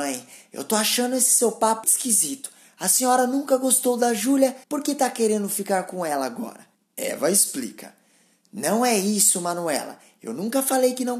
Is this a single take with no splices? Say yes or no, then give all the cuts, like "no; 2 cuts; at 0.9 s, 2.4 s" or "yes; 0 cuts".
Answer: no; 3 cuts; at 1.8 s, 4.6 s, 6.7 s